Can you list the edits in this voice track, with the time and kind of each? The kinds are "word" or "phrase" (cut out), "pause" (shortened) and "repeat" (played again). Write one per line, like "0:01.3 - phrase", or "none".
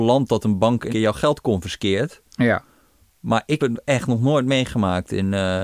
0:00.9 - word
0:03.6 - word